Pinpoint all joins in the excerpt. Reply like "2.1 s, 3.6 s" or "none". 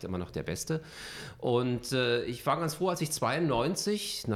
none